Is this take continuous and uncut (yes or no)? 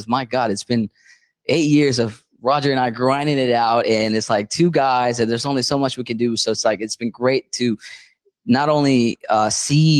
yes